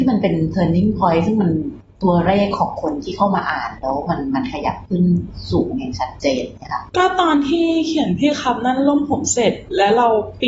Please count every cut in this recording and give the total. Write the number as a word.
zero